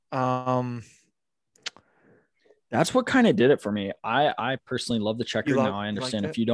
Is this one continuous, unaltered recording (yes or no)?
yes